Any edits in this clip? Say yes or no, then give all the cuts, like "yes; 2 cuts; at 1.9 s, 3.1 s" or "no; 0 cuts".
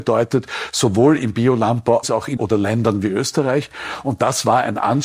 yes; 2 cuts; at 2.0 s, 2.4 s